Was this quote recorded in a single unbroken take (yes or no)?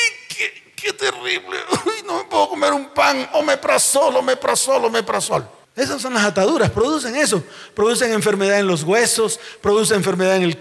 yes